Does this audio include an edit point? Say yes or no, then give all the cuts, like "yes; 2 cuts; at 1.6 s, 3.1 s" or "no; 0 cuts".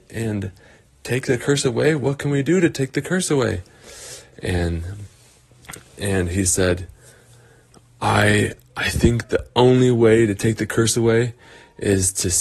no; 0 cuts